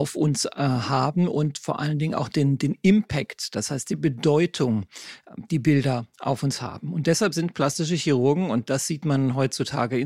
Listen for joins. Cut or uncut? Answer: uncut